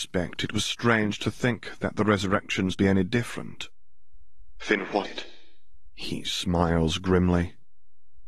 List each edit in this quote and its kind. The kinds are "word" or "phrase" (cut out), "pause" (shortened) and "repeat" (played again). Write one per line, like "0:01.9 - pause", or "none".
0:02.7 - phrase
0:05.0 - word

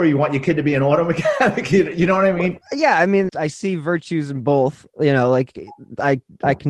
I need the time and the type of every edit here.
0:02.6 - pause
0:03.3 - word

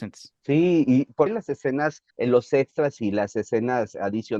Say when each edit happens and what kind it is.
0:01.3 - word
0:02.1 - pause

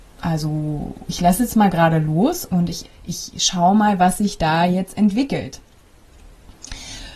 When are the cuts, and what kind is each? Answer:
0:02.8 - word

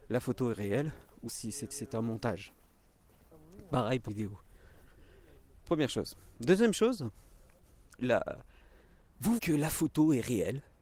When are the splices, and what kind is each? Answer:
0:01.3 - word
0:01.7 - repeat
0:04.1 - word
0:08.0 - phrase
0:09.4 - word

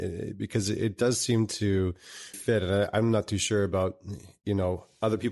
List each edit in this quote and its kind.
0:02.3 - word

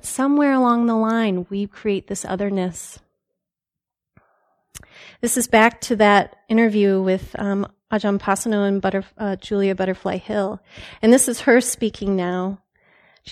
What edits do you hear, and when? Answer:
none

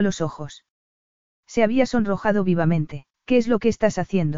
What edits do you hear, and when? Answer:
0:03.1 - pause

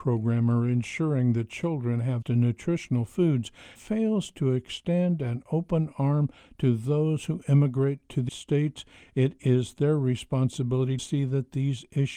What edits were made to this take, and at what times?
0:02.2 - word
0:03.8 - word
0:08.3 - word
0:11.0 - word

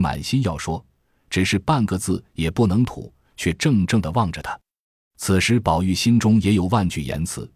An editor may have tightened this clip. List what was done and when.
none

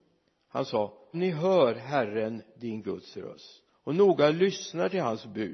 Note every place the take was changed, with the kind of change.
0:01.1 - word
0:03.7 - pause

